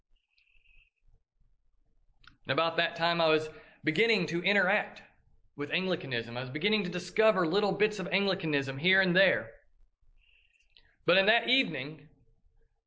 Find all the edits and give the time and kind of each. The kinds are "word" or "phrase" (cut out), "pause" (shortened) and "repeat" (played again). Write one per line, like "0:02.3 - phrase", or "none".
none